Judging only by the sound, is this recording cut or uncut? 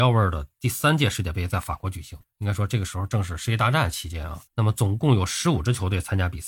cut